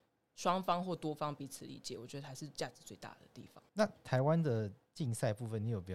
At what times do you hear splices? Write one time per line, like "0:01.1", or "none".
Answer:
0:03.7